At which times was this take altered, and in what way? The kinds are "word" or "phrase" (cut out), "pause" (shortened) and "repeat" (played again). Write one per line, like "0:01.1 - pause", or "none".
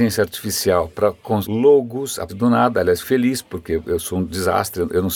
0:01.4 - word
0:02.3 - word
0:03.0 - word
0:03.8 - word